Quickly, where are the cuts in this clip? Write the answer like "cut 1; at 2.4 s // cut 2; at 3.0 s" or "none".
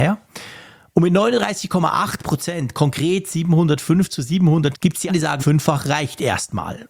cut 1; at 4.7 s // cut 2; at 5.1 s // cut 3; at 5.4 s